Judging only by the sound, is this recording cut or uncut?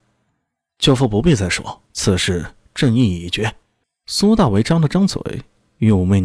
cut